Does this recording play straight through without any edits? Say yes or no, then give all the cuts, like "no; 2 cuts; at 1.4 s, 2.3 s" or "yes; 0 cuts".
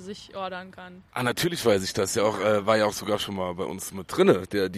no; 1 cut; at 1.1 s